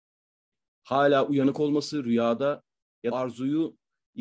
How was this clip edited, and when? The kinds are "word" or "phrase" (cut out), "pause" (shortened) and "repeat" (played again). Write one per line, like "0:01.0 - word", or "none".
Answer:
0:03.1 - phrase